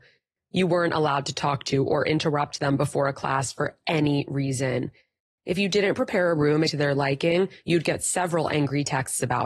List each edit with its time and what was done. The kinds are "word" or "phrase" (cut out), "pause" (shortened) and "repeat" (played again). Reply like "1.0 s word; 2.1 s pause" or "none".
6.7 s word